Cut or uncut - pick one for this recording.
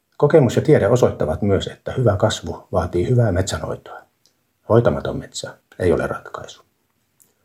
uncut